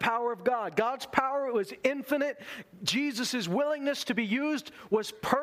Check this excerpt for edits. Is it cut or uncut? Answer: uncut